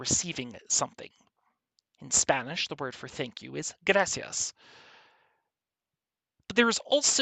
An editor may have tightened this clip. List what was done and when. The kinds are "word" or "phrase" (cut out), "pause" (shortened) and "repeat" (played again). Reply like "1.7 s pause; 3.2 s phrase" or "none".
none

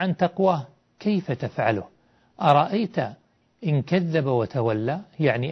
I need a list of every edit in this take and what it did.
1.3 s phrase

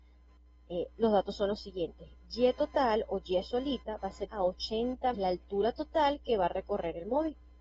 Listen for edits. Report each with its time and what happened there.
4.3 s word; 5.1 s phrase

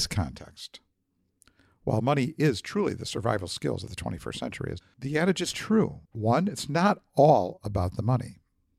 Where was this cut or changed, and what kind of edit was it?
4.8 s phrase; 6.0 s pause

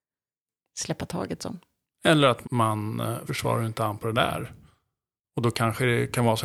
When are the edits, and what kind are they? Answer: 1.8 s pause; 2.4 s word; 3.3 s phrase

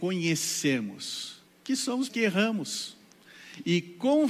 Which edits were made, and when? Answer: 1.5 s pause; 2.1 s word

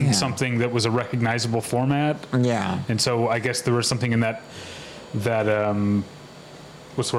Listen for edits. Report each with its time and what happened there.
none

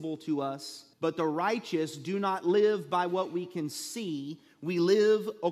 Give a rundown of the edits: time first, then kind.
0.9 s pause

